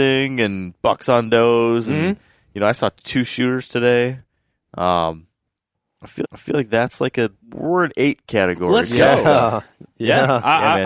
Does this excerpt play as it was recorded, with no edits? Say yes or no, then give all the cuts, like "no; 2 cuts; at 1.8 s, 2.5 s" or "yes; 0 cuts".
no; 2 cuts; at 6.2 s, 7.4 s